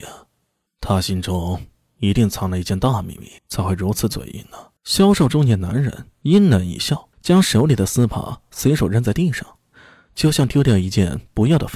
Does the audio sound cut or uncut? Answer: cut